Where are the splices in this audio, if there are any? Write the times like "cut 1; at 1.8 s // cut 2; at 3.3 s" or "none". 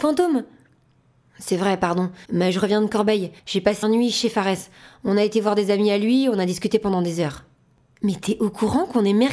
cut 1; at 2.2 s // cut 2; at 3.4 s // cut 3; at 3.8 s